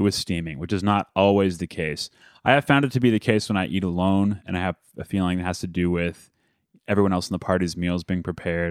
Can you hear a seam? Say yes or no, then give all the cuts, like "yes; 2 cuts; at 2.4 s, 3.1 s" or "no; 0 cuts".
no; 0 cuts